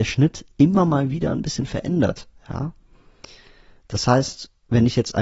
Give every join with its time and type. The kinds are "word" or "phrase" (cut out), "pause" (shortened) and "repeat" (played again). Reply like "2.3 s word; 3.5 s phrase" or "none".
none

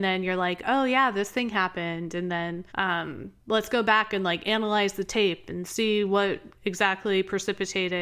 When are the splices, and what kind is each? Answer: 2.7 s pause; 6.6 s word

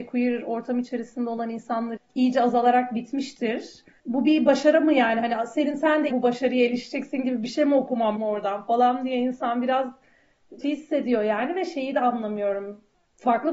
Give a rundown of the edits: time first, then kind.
2.0 s word; 4.0 s word; 6.1 s word; 8.2 s word; 10.6 s word

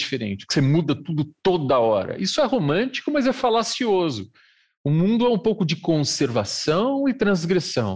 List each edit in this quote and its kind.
none

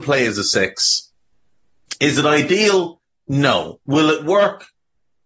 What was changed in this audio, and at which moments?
3.8 s pause

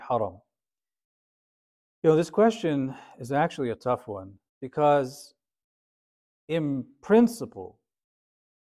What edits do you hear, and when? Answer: 4.5 s pause

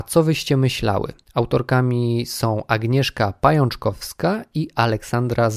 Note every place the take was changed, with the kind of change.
1.2 s pause

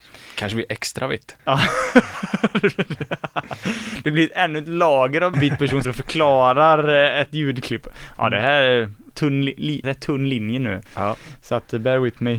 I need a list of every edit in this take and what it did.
1.4 s pause; 5.3 s phrase; 5.8 s word; 9.1 s word; 9.8 s word; 10.9 s pause

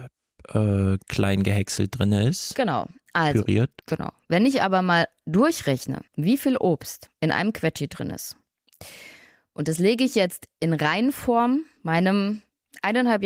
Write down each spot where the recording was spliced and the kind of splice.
3.8 s pause; 6.1 s pause

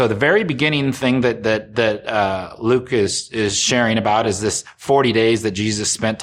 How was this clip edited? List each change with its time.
none

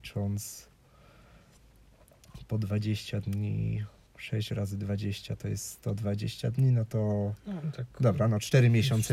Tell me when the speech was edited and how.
4.1 s pause

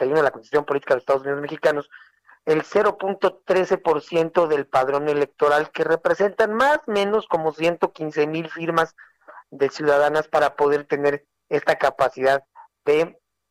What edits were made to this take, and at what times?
none

